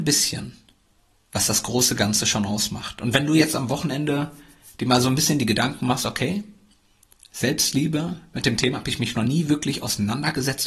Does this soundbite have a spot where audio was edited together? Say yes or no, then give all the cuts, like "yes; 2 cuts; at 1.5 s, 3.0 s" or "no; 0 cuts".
no; 0 cuts